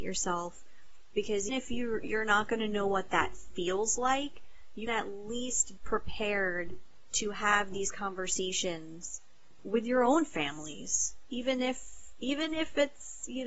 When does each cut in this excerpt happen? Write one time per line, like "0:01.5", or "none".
0:01.5
0:04.9
0:05.8
0:09.6